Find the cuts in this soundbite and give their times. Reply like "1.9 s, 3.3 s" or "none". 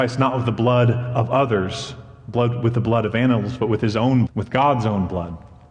4.3 s